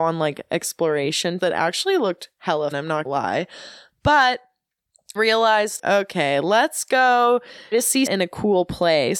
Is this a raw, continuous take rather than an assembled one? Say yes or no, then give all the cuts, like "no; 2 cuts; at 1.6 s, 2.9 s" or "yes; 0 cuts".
no; 7 cuts; at 1.4 s, 2.7 s, 3.0 s, 5.2 s, 5.8 s, 7.7 s, 8.1 s